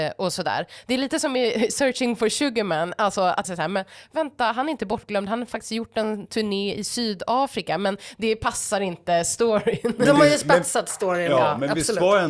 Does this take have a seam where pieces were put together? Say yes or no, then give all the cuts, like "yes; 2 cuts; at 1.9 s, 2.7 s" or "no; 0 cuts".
yes; 1 cut; at 3.4 s